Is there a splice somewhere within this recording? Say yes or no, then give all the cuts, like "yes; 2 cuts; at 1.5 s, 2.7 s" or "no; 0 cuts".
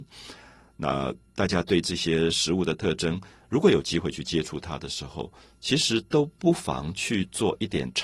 no; 0 cuts